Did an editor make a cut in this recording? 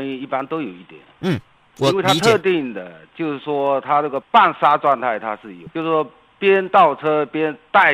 no; 0 cuts

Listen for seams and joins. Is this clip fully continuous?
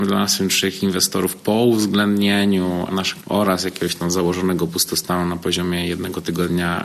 no; 1 cut; at 3.2 s

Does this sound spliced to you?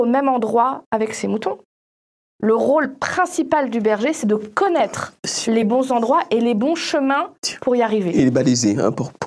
no; 0 cuts

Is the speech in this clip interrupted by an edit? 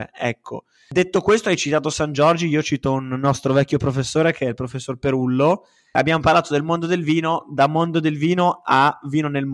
no; 0 cuts

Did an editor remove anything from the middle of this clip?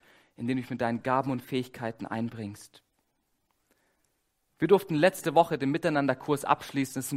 no; 0 cuts

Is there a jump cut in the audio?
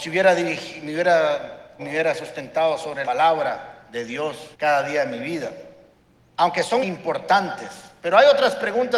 yes; 5 cuts; at 1.8 s, 3.0 s, 4.5 s, 5.9 s, 6.8 s

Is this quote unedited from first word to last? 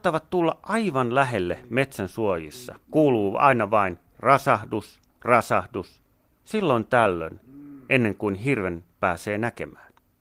no; 3 cuts; at 2.8 s, 5.1 s, 8.9 s

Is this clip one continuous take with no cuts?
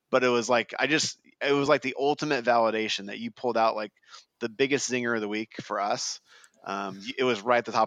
yes; 0 cuts

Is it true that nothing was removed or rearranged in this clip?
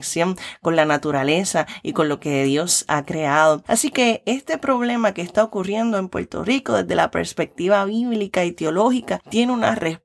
yes; 0 cuts

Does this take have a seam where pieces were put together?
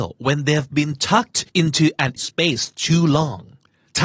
yes; 2 cuts; at 1.5 s, 2.2 s

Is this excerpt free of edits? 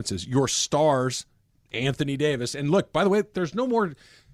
yes; 0 cuts

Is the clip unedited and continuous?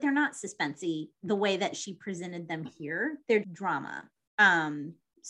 no; 1 cut; at 3.4 s

